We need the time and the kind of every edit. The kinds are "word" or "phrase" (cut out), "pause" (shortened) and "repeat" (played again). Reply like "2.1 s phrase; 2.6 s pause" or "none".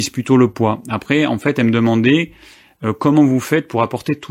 none